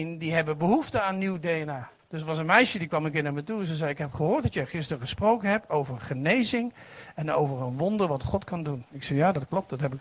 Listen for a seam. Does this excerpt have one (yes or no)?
yes